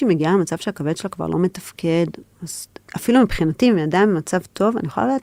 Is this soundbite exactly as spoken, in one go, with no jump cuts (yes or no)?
yes